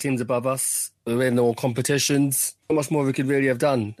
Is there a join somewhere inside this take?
yes; 2 cuts; at 1.0 s, 2.6 s

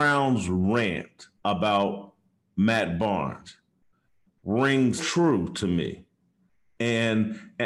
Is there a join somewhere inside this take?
yes; 2 cuts; at 1.4 s, 5.0 s

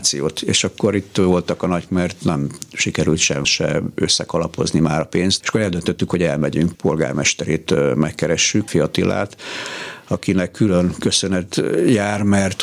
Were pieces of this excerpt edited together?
yes; 5 cuts; at 1.9 s, 3.4 s, 5.4 s, 6.7 s, 8.7 s

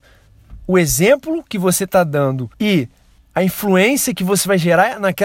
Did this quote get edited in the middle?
yes; 1 cut; at 2.5 s

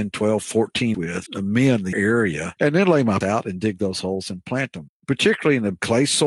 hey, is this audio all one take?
no; 4 cuts; at 0.9 s, 1.3 s, 1.9 s, 3.2 s

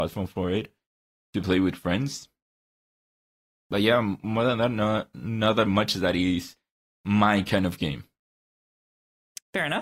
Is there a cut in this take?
no; 0 cuts

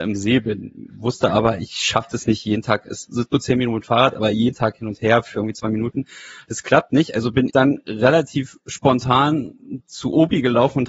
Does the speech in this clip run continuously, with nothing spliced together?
no; 1 cut; at 7.5 s

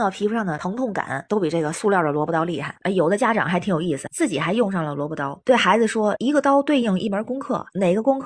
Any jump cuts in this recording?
no; 0 cuts

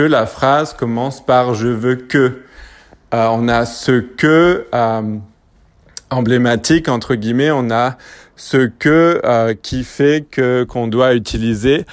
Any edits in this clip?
no; 0 cuts

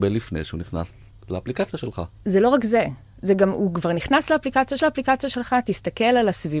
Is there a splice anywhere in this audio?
yes; 1 cut; at 4.8 s

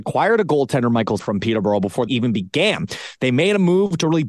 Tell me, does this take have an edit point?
yes; 2 cuts; at 1.2 s, 2.1 s

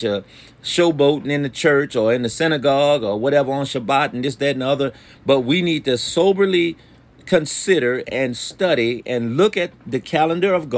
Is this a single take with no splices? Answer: no; 1 cut; at 9.7 s

